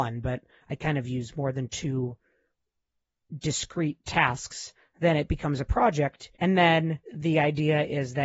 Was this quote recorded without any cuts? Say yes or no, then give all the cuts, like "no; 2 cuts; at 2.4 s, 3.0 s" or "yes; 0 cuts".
no; 2 cuts; at 6.4 s, 7.0 s